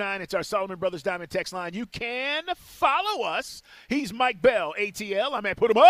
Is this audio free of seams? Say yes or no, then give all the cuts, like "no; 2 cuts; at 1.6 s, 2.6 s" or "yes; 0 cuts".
yes; 0 cuts